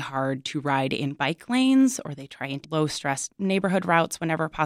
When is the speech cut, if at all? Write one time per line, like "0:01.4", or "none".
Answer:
0:01.2
0:02.6
0:03.3

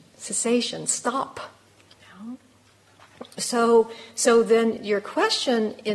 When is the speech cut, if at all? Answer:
0:01.9

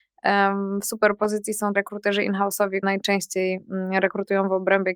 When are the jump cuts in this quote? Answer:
0:01.7
0:02.8

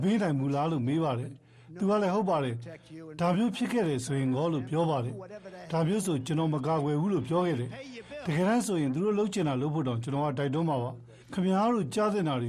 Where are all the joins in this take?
0:11.2

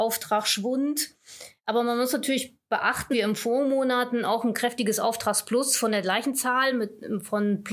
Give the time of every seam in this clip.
0:03.1

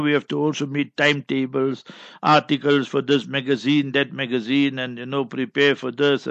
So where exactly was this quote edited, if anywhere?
none

